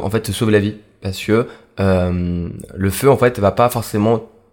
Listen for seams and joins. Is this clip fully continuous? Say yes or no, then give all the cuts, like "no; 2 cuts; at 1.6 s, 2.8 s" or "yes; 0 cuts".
yes; 0 cuts